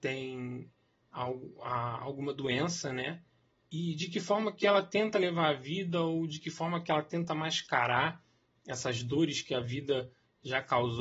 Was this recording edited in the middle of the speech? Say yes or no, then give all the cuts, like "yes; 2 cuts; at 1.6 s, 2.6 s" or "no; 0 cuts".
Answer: no; 0 cuts